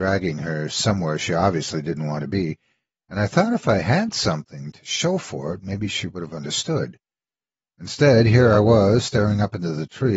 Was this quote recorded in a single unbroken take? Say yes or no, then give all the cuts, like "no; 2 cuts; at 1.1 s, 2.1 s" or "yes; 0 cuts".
yes; 0 cuts